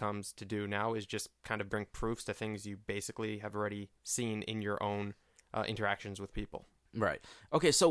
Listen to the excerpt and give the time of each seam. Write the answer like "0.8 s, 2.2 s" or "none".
none